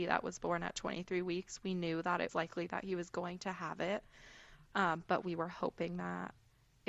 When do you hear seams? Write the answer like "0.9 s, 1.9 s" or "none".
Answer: 2.3 s